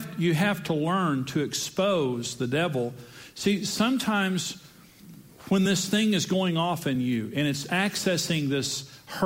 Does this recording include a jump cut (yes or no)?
no